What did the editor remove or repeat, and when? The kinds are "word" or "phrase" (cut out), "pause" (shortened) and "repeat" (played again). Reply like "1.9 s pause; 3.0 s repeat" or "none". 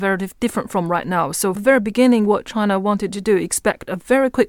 1.6 s word